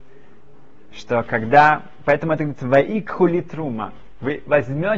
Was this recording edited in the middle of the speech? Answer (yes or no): no